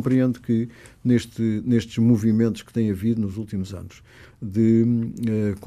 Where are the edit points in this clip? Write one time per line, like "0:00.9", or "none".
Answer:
none